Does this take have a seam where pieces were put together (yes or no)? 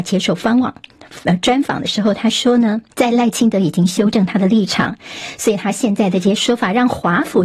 yes